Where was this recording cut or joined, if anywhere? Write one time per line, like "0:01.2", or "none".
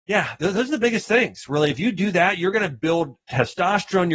0:03.2

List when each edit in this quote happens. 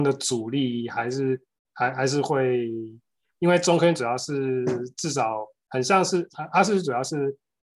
none

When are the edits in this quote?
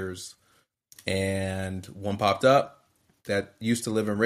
none

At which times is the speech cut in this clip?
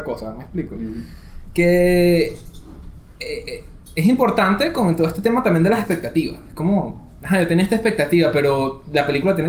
0:03.1

